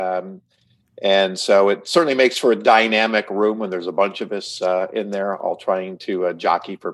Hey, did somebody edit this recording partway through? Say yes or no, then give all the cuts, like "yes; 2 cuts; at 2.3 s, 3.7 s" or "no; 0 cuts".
no; 0 cuts